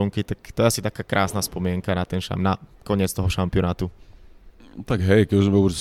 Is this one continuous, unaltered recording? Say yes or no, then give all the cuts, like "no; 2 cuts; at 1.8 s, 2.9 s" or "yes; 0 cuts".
yes; 0 cuts